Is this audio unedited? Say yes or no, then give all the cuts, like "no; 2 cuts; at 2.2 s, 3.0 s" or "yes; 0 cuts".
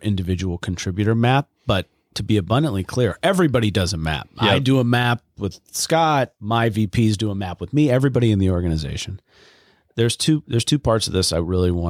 yes; 0 cuts